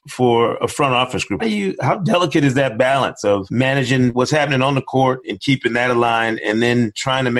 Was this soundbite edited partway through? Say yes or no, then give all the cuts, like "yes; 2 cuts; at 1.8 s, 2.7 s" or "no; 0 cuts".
yes; 2 cuts; at 1.4 s, 5.2 s